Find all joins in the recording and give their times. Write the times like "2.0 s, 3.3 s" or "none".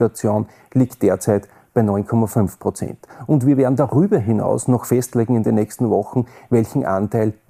none